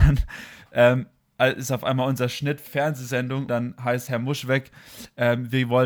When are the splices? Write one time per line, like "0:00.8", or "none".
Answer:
0:02.7
0:03.5
0:04.1